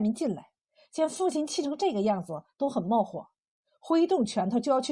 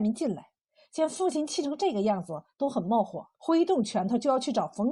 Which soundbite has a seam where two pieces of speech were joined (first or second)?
second